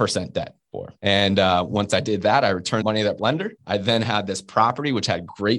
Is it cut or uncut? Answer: cut